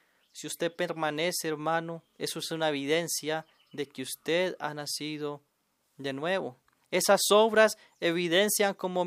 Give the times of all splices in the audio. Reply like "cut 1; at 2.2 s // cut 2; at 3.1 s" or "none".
cut 1; at 2.1 s